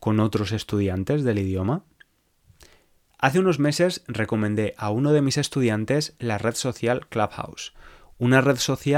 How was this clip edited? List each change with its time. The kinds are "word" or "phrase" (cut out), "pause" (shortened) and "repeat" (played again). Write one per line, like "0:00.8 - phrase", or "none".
none